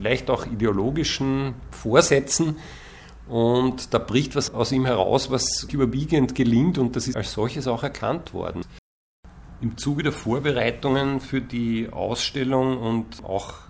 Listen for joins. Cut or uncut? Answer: cut